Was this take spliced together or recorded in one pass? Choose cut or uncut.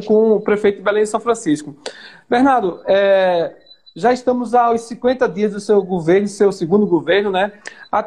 uncut